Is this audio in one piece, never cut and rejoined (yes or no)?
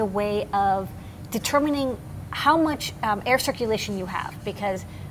yes